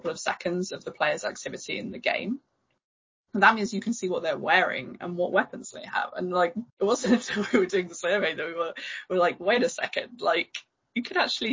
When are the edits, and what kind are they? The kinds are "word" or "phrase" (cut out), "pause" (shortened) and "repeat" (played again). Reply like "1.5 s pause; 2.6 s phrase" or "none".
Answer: 6.7 s pause